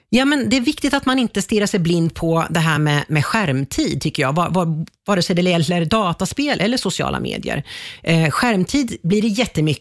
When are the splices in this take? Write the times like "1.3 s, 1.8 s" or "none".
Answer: none